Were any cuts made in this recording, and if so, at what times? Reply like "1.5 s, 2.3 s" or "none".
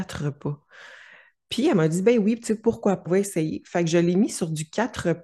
3.1 s